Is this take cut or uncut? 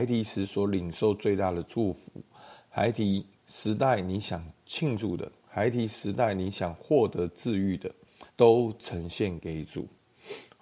cut